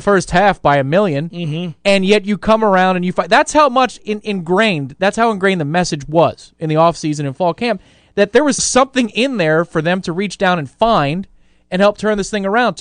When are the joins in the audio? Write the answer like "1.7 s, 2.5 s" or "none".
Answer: 8.6 s